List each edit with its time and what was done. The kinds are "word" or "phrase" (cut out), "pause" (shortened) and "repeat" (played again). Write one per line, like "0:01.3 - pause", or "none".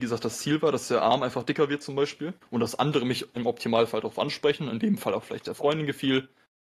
0:02.4 - pause